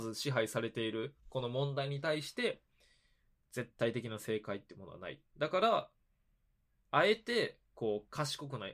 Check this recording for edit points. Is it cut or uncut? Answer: uncut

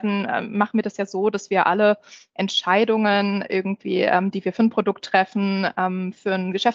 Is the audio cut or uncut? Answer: uncut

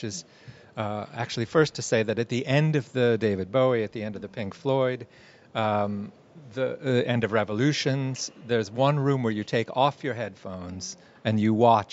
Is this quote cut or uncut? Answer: uncut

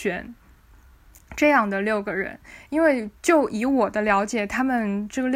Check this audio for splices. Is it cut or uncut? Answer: uncut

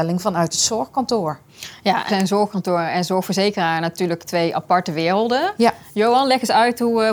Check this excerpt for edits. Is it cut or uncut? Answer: cut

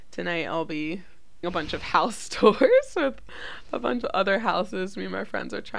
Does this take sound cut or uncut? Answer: cut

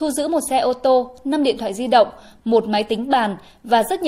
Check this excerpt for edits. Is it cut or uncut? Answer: uncut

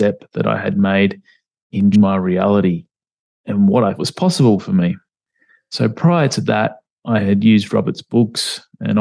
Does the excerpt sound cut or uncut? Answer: cut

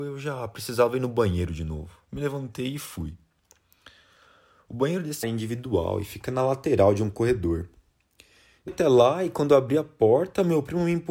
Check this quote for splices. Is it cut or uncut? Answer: cut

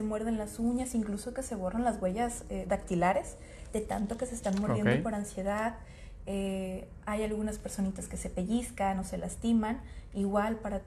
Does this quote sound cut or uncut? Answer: uncut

